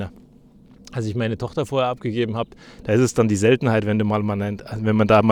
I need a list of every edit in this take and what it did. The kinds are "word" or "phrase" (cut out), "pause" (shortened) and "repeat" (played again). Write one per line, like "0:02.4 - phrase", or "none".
none